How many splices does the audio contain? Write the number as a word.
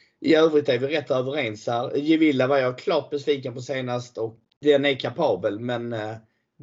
one